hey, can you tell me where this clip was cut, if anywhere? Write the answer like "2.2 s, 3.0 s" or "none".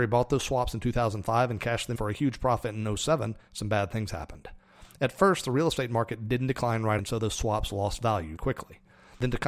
2.0 s, 7.0 s, 8.4 s